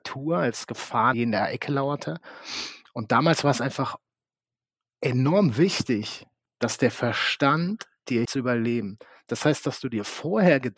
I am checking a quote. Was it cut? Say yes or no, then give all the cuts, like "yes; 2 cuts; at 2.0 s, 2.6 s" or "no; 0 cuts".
yes; 3 cuts; at 1.1 s, 6.5 s, 8.2 s